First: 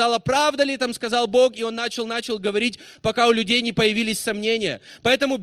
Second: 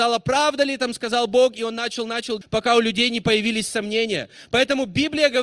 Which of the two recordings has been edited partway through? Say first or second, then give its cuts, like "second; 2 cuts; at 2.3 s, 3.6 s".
second; 1 cut; at 2.4 s